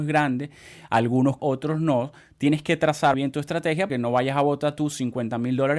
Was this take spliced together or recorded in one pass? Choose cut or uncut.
cut